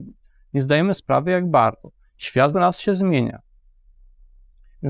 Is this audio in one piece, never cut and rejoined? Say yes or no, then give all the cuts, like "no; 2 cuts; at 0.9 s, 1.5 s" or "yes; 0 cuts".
no; 2 cuts; at 1.0 s, 2.5 s